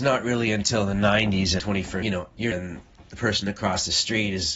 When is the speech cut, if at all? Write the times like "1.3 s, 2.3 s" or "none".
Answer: 2.0 s, 2.5 s